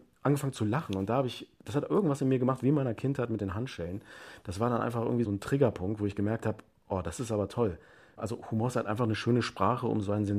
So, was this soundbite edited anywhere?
no; 0 cuts

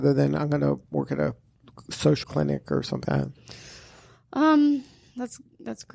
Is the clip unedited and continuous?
no; 2 cuts; at 2.2 s, 3.0 s

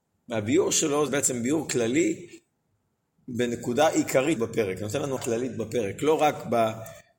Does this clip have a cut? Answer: yes; 3 cuts; at 1.1 s, 4.4 s, 5.2 s

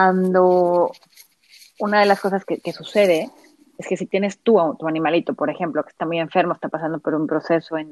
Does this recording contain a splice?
no; 0 cuts

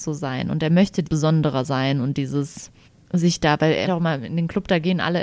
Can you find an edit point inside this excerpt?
yes; 3 cuts; at 1.0 s, 2.9 s, 3.9 s

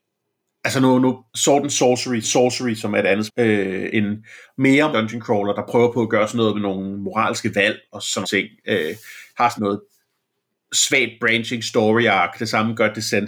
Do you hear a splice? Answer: yes; 8 cuts; at 1.3 s, 2.2 s, 3.3 s, 3.9 s, 4.9 s, 7.9 s, 8.2 s, 9.6 s

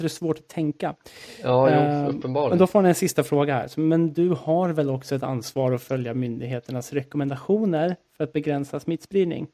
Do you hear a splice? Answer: no; 0 cuts

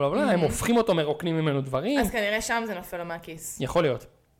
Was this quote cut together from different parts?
no; 0 cuts

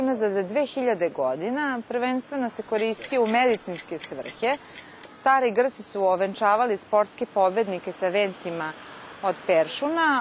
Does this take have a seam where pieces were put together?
no; 0 cuts

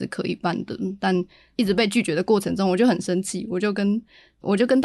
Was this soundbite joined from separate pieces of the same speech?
no; 0 cuts

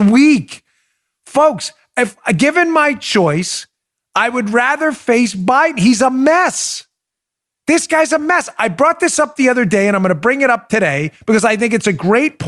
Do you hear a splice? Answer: no; 0 cuts

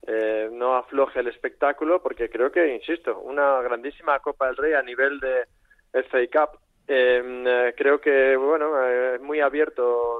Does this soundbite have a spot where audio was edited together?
no; 0 cuts

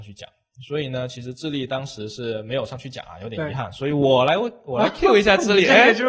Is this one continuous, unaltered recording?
yes; 0 cuts

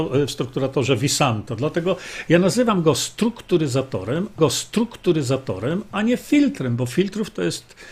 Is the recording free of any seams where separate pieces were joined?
no; 1 cut; at 4.4 s

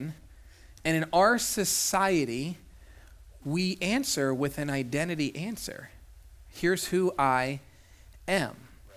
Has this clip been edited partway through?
no; 0 cuts

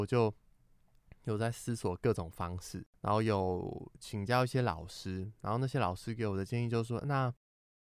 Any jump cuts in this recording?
yes; 1 cut; at 2.9 s

